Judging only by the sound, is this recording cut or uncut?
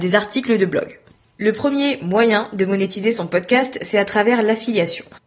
uncut